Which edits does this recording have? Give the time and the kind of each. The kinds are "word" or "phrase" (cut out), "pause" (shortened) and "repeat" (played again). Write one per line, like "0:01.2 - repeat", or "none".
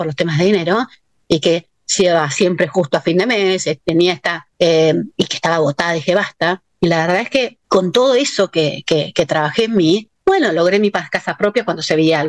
0:04.5 - pause
0:07.6 - pause
0:10.2 - pause

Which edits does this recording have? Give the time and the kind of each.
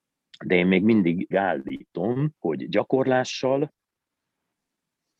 0:01.3 - word
0:02.4 - pause

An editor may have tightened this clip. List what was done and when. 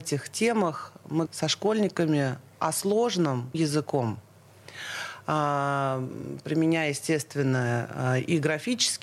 0:01.3 - word
0:03.5 - word

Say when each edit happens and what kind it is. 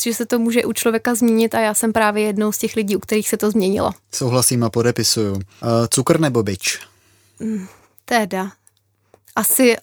none

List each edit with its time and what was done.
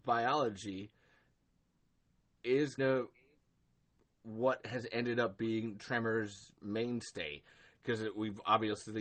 0:02.8 - word

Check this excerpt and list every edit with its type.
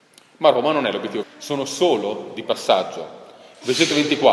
0:01.2 - word

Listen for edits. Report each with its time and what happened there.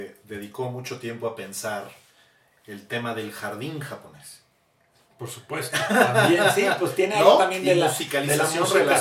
none

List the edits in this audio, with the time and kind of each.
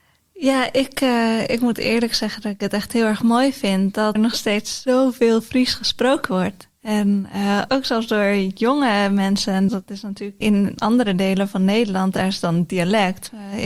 0:04.2 - word
0:07.7 - word
0:09.7 - word
0:10.4 - word

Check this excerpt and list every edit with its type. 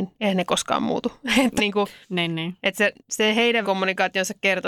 0:01.6 - word
0:02.0 - pause
0:03.0 - pause
0:03.6 - word

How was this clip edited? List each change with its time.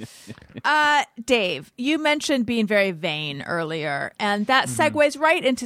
none

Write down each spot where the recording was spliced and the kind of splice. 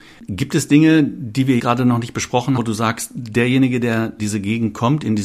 0:01.6 - word
0:02.6 - word
0:04.2 - word

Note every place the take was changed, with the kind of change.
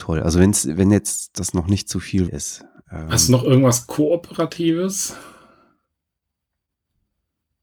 0:02.3 - word

